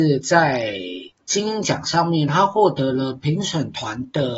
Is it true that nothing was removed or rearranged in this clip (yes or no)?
no